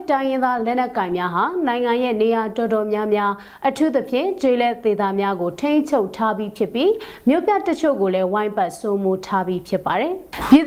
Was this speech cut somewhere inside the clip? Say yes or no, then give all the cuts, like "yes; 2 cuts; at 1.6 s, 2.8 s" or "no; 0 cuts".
no; 0 cuts